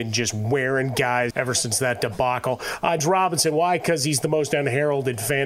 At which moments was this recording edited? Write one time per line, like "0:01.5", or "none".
0:01.3
0:03.0